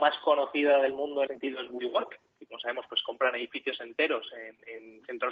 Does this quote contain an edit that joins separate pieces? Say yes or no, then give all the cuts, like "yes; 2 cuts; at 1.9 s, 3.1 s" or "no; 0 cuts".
yes; 1 cut; at 1.3 s